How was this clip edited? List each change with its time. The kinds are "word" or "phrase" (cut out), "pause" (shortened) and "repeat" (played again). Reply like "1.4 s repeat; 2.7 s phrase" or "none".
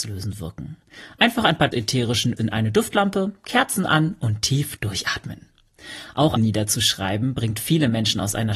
1.7 s phrase; 2.4 s word; 6.4 s phrase